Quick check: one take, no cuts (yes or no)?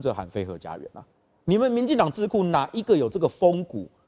no